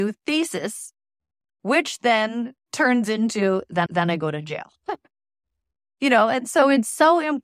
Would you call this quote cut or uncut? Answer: cut